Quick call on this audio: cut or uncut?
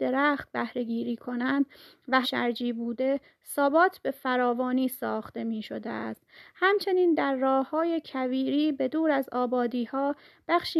cut